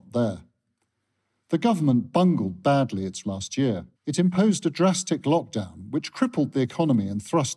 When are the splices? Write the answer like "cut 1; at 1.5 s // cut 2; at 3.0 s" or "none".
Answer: cut 1; at 3.2 s // cut 2; at 3.9 s